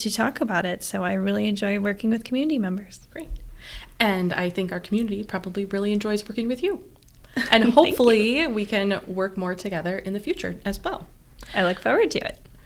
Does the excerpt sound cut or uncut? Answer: cut